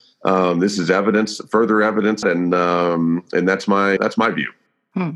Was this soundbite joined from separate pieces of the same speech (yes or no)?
yes